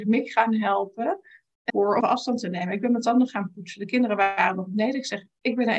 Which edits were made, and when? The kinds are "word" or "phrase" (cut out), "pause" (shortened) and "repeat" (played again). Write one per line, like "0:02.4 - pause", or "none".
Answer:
0:01.7 - phrase
0:02.0 - word